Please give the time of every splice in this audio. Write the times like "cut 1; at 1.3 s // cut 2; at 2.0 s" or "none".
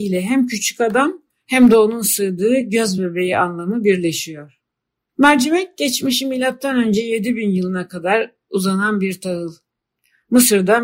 none